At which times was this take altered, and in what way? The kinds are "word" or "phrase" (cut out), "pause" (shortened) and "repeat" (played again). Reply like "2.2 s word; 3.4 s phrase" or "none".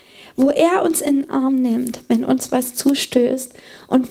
none